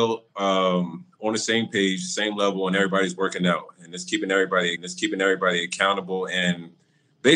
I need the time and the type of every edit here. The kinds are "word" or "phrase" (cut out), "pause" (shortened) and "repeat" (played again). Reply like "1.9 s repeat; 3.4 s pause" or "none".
4.8 s repeat